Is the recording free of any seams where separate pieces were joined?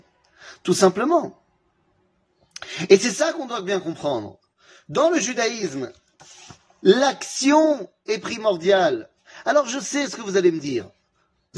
yes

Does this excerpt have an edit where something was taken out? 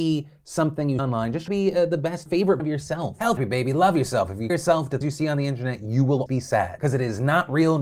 yes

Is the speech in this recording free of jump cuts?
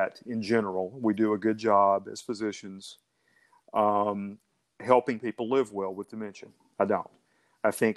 yes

